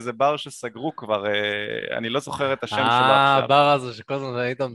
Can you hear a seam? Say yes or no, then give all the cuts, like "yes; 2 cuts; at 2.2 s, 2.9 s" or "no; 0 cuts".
no; 0 cuts